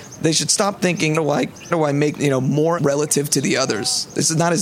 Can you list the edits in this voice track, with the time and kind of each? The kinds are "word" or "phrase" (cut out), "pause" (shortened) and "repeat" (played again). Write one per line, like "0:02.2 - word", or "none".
0:01.2 - word
0:01.7 - word
0:02.1 - phrase
0:02.8 - word